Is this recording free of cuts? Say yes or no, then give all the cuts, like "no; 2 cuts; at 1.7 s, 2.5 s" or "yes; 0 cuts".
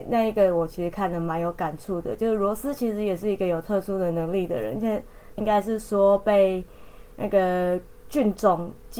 no; 1 cut; at 5.4 s